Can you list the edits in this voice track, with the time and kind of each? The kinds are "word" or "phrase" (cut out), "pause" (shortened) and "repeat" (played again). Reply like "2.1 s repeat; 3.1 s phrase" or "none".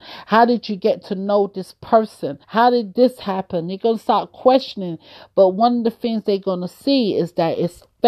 2.4 s pause